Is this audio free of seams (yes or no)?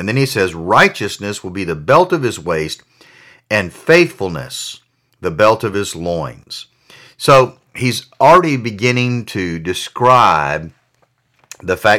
yes